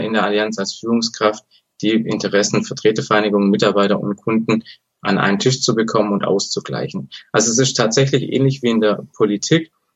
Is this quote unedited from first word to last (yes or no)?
yes